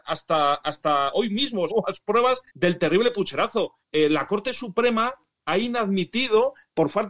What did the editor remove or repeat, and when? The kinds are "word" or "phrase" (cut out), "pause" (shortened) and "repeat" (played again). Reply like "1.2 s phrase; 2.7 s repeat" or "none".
1.7 s word; 2.5 s pause; 3.8 s pause